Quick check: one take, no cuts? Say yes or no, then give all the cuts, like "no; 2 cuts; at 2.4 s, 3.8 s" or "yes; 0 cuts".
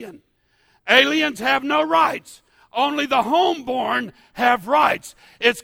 yes; 0 cuts